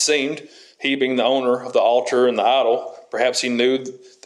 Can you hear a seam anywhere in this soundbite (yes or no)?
no